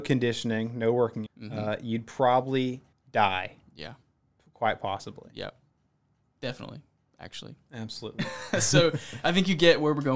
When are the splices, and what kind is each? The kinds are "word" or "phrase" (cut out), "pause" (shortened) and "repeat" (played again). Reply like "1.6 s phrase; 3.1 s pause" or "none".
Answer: 1.3 s word; 2.9 s pause

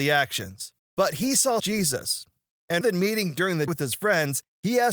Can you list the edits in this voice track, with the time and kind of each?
1.6 s phrase; 2.8 s word; 3.7 s word

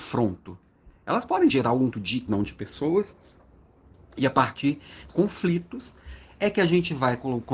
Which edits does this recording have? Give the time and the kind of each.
1.5 s word; 1.9 s word; 2.3 s word; 5.1 s word

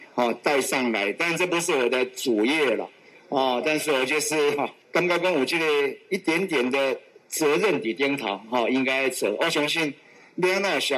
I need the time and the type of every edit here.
none

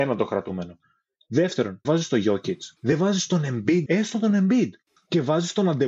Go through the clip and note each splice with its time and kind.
1.8 s word; 2.8 s pause; 3.9 s word

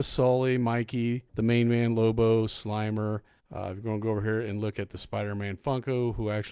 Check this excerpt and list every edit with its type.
1.3 s pause; 3.4 s pause

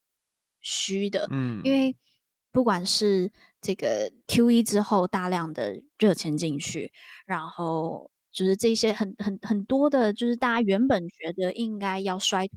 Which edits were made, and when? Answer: none

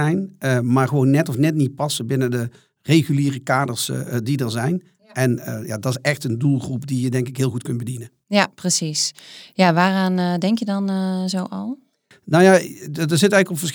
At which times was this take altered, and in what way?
none

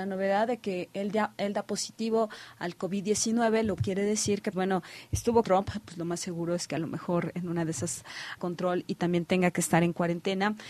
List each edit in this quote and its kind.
3.8 s word; 4.5 s word; 5.4 s phrase; 8.4 s word

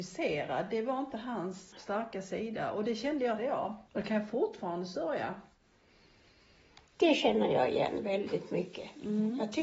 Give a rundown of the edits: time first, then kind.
1.7 s word; 3.4 s phrase; 3.9 s pause; 6.9 s pause

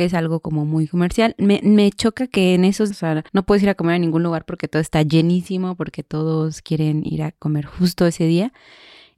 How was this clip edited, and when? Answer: 2.9 s word; 3.3 s pause

